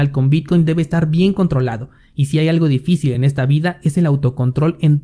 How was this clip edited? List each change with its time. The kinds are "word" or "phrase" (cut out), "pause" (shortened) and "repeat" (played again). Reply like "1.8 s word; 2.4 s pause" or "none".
none